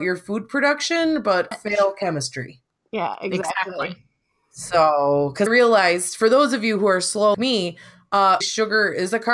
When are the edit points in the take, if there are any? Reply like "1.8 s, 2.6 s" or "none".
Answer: 1.5 s, 5.5 s, 7.3 s, 8.4 s